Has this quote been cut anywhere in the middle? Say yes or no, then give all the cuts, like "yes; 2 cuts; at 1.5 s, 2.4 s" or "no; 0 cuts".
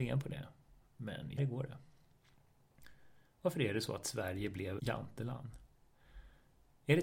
yes; 2 cuts; at 1.4 s, 4.8 s